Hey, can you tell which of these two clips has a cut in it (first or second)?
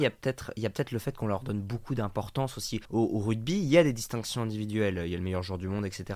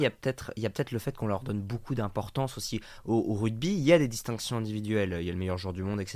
first